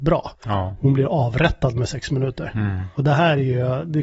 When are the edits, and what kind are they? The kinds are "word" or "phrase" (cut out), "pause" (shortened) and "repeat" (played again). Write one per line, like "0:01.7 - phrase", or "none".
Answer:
none